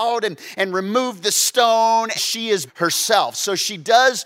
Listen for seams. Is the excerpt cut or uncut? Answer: cut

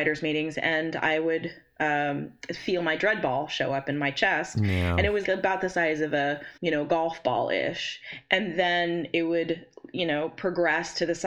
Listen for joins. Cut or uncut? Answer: cut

